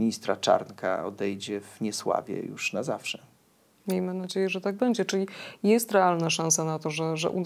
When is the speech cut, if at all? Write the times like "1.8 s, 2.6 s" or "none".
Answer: none